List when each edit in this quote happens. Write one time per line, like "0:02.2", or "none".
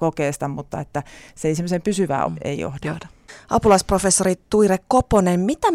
0:02.3